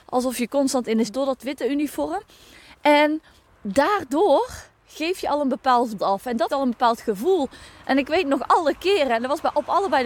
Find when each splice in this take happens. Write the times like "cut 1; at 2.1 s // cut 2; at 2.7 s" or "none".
cut 1; at 1.1 s // cut 2; at 3.4 s // cut 3; at 6.0 s // cut 4; at 6.5 s